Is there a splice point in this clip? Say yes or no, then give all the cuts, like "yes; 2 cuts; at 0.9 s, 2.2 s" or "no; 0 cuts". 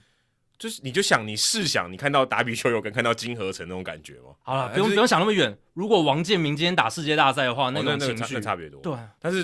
yes; 1 cut; at 4.4 s